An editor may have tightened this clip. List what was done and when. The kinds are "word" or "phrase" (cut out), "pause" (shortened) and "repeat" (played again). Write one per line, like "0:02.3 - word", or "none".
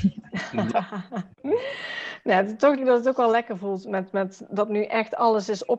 0:01.3 - pause
0:02.8 - word